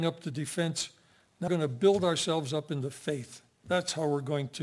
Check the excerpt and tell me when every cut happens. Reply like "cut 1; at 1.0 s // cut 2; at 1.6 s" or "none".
cut 1; at 1.5 s